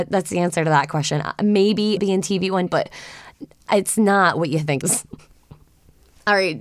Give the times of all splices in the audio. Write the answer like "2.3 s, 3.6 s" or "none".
2.0 s, 2.7 s, 4.8 s